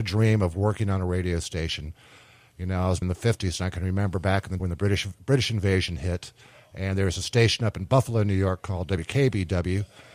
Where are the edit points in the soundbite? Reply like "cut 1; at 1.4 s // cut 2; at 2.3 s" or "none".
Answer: cut 1; at 3.0 s // cut 2; at 4.6 s